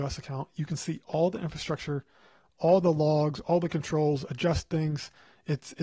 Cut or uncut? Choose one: uncut